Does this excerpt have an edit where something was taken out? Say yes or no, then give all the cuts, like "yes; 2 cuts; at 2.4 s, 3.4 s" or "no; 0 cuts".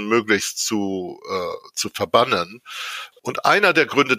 no; 0 cuts